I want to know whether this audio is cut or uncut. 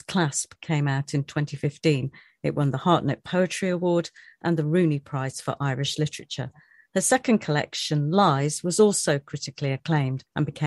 uncut